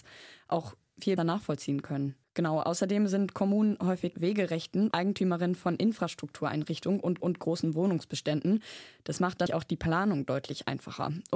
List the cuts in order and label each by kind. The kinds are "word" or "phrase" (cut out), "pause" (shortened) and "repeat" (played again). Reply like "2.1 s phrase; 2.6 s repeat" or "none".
1.2 s word; 2.2 s pause; 4.1 s phrase; 4.9 s word; 7.2 s repeat; 9.5 s word

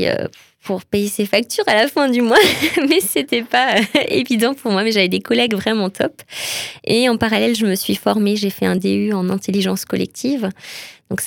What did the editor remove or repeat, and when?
none

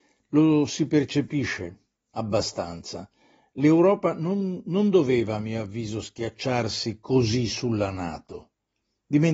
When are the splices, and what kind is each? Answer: none

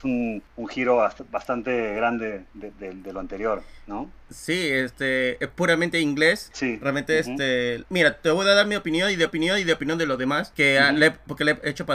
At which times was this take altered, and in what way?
9.3 s repeat

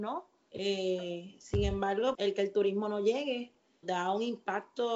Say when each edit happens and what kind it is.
2.1 s word; 3.8 s word

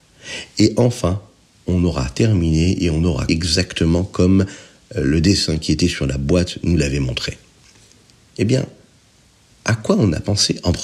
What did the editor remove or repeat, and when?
3.3 s word

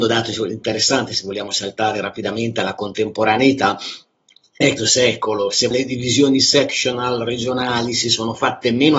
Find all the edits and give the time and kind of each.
4.8 s phrase; 5.7 s word

